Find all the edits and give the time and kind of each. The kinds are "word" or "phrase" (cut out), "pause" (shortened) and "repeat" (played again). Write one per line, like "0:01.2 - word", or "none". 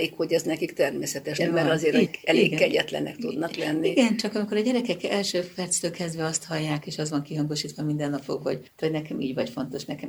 0:01.4 - word
0:02.1 - word
0:08.8 - word